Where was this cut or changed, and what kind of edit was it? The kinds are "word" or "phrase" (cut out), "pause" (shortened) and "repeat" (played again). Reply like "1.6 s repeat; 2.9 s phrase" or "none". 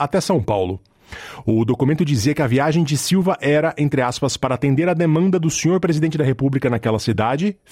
none